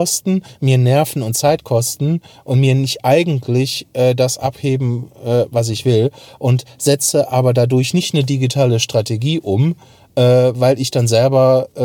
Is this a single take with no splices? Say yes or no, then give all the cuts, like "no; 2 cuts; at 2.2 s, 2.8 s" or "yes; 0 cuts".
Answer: yes; 0 cuts